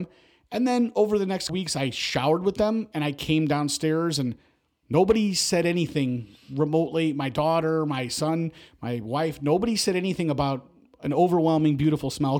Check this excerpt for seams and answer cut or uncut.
cut